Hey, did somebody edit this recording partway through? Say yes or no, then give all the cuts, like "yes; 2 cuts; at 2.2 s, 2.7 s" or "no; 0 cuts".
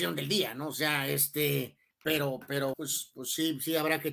yes; 2 cuts; at 1.9 s, 2.7 s